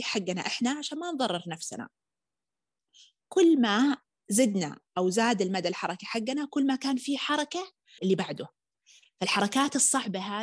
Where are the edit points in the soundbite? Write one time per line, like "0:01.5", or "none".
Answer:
0:04.9
0:08.0